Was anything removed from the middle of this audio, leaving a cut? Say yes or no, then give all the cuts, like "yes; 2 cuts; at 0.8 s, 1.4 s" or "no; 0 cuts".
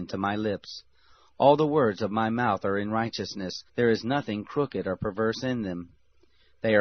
yes; 1 cut; at 3.7 s